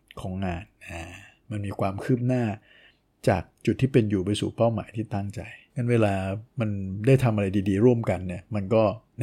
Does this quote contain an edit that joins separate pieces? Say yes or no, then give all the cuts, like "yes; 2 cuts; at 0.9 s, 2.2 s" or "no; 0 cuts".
no; 0 cuts